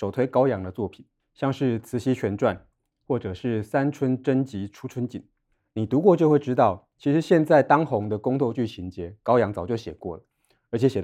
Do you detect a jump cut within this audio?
yes; 1 cut; at 1.2 s

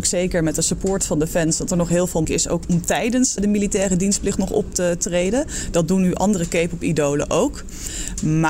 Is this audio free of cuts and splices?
no; 3 cuts; at 2.2 s, 2.6 s, 3.4 s

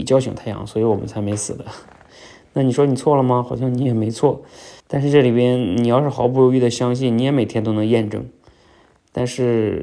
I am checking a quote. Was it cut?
yes; 1 cut; at 4.8 s

